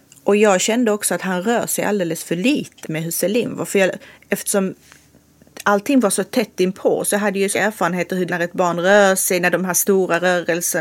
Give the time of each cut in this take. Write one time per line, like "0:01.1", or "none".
0:02.8
0:07.5
0:08.3

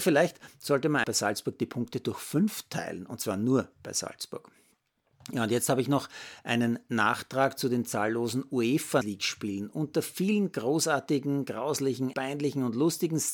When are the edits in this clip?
0:01.0
0:09.0
0:12.1

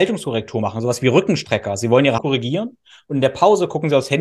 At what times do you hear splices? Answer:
0:02.2

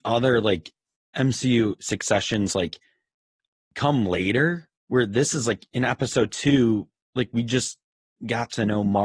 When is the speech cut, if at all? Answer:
0:04.8

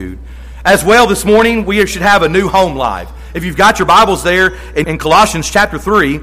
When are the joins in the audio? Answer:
0:04.8

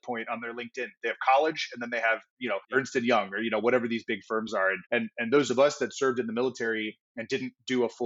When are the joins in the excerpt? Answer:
0:02.6
0:04.9

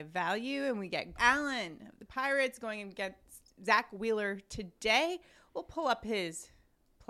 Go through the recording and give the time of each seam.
0:01.2
0:02.1

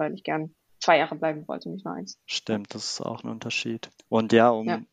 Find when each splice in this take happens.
none

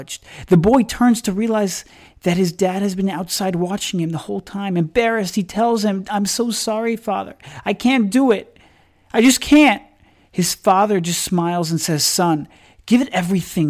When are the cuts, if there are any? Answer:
none

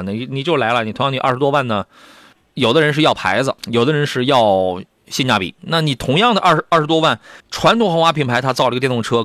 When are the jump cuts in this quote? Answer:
0:02.3
0:03.6
0:07.4

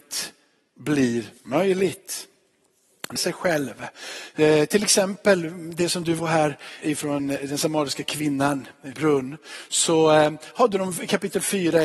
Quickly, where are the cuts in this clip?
0:01.4
0:03.2
0:06.2
0:06.8
0:07.2
0:08.9

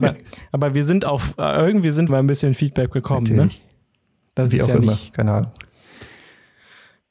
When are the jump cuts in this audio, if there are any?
0:02.1

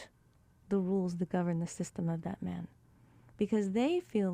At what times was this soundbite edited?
none

